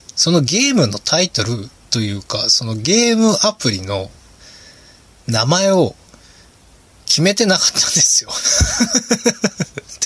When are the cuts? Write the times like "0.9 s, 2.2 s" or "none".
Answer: none